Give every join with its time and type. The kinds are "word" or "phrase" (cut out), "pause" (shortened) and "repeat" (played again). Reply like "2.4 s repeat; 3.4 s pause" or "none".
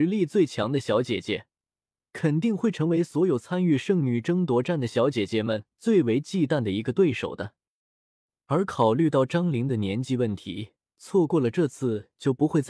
10.8 s pause